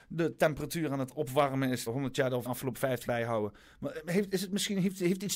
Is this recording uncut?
no; 3 cuts; at 1.9 s, 2.5 s, 3.1 s

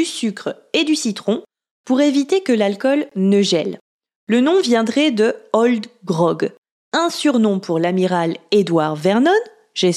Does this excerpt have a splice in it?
no; 0 cuts

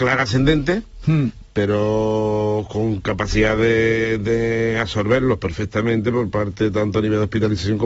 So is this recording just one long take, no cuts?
yes; 0 cuts

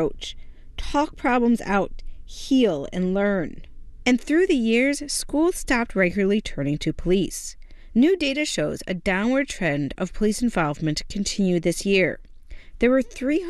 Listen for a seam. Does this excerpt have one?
no; 0 cuts

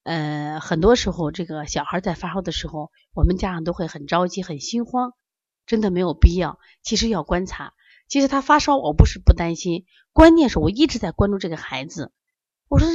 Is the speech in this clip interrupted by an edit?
no; 0 cuts

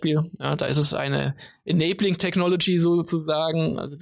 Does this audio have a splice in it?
no; 0 cuts

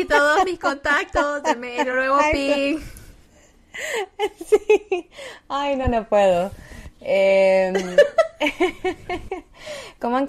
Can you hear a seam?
no; 0 cuts

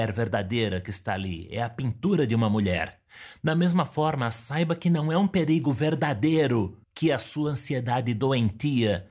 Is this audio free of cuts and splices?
no; 1 cut; at 6.8 s

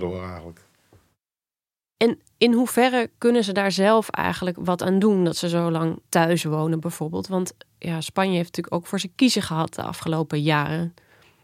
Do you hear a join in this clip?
yes; 2 cuts; at 3.1 s, 6.1 s

